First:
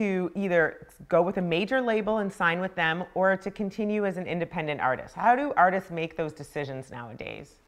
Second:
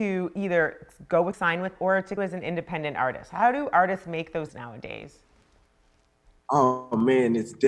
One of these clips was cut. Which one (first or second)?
second